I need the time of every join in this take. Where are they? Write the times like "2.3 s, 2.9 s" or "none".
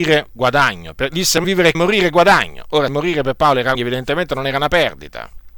1.4 s, 1.7 s, 2.9 s, 3.7 s

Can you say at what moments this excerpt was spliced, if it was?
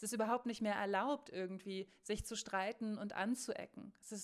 none

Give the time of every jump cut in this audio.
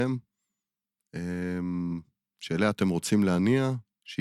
none

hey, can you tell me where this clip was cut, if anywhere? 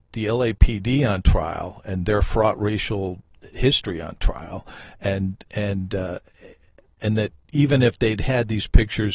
none

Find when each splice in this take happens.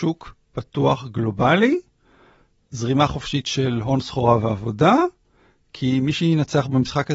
none

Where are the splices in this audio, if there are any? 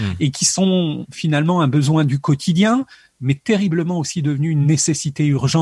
none

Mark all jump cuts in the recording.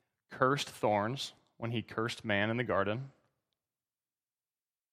none

